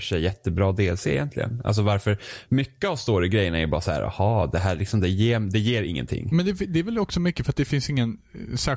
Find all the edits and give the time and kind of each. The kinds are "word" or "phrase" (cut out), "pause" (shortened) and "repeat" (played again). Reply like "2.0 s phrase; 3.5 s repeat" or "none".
none